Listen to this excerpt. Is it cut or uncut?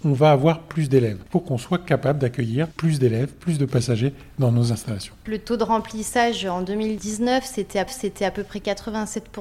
cut